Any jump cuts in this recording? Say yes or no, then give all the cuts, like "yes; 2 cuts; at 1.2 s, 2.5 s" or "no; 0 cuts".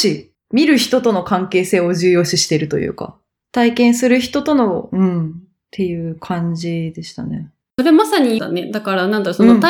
yes; 1 cut; at 8.4 s